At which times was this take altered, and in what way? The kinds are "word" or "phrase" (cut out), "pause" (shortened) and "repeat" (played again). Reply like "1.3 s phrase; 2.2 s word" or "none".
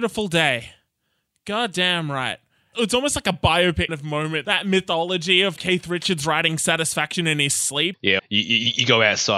3.9 s word; 4.4 s word; 5.6 s word; 8.2 s word